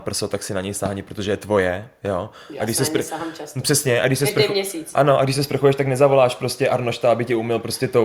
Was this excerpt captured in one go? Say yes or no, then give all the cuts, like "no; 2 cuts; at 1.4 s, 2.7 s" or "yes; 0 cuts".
yes; 0 cuts